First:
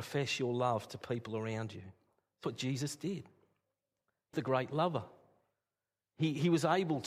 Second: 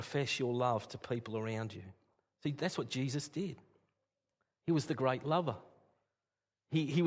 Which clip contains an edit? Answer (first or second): first